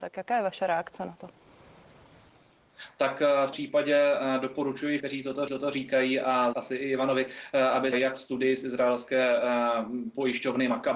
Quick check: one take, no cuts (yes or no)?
no